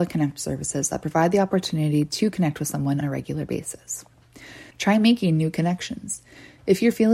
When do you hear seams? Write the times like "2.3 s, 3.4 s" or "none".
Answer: 3.0 s, 4.7 s